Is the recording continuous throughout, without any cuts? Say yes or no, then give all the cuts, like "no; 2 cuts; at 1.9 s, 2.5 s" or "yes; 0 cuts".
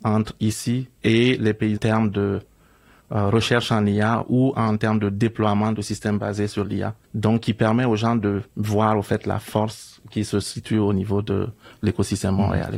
no; 4 cuts; at 0.9 s, 1.8 s, 7.0 s, 8.5 s